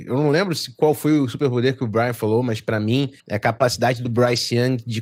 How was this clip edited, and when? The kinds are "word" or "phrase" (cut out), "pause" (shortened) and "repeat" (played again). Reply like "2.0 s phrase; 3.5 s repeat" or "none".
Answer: 3.2 s pause